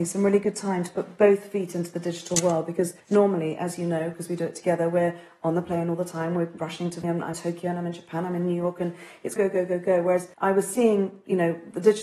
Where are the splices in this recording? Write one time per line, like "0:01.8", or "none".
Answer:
0:03.0
0:07.0
0:07.3
0:09.4
0:10.3